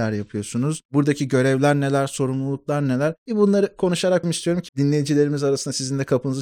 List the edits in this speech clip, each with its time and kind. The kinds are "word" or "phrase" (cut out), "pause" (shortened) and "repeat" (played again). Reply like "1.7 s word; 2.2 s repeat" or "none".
4.2 s word; 4.7 s word